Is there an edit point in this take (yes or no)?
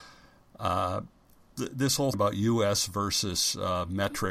yes